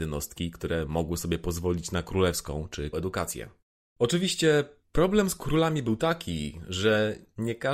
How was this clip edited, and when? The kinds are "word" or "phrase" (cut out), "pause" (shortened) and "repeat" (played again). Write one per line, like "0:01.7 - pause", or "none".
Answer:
0:02.9 - word